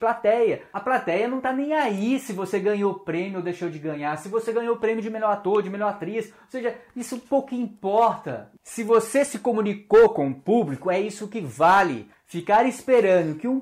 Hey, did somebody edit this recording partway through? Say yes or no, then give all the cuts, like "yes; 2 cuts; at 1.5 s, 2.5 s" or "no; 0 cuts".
no; 0 cuts